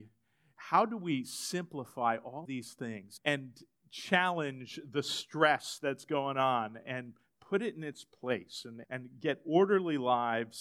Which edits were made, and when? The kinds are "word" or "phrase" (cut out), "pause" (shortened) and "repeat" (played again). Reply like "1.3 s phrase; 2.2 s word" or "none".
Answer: 2.5 s word; 3.2 s word; 8.8 s word